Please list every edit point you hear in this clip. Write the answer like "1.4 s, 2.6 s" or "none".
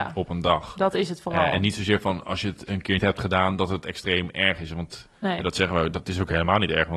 3.0 s